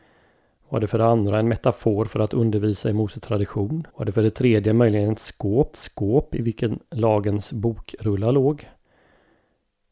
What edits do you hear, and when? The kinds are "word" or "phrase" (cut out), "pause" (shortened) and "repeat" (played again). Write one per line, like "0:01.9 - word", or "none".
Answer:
0:03.9 - pause
0:05.7 - repeat